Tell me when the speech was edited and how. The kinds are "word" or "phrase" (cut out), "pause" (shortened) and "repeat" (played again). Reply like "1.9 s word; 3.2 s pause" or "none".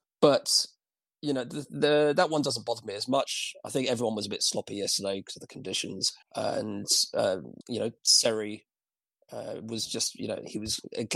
6.2 s pause; 7.6 s pause; 8.0 s pause

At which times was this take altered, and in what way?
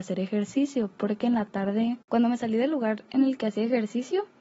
none

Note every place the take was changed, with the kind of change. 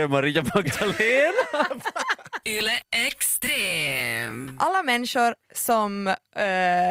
none

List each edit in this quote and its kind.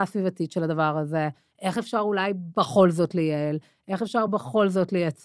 none

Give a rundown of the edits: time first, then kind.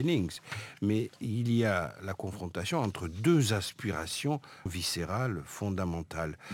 4.7 s word

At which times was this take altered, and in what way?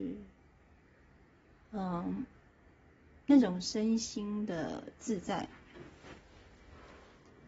none

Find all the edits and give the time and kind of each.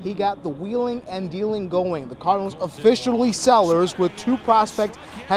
none

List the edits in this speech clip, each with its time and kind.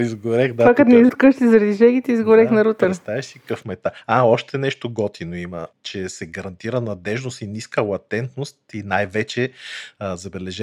1.1 s word

